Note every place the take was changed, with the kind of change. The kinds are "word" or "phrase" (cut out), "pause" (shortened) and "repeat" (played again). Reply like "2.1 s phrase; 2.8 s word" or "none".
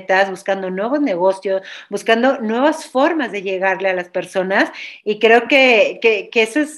none